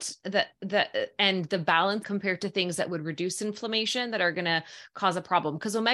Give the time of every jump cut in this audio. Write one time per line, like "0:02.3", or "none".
0:02.0